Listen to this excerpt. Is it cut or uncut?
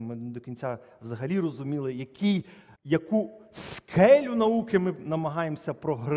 cut